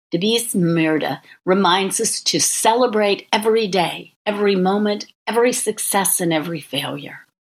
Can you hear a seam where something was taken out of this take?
yes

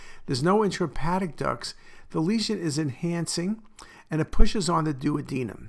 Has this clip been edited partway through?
no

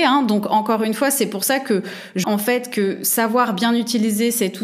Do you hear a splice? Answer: yes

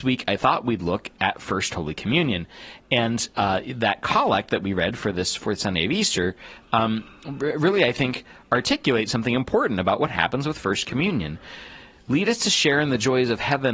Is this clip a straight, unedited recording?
yes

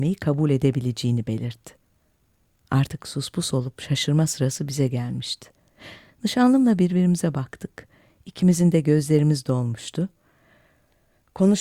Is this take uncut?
yes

